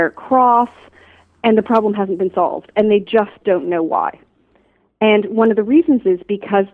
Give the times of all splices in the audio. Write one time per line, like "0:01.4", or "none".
none